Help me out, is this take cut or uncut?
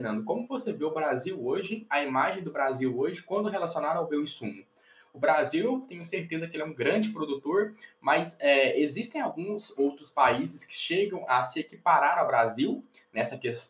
uncut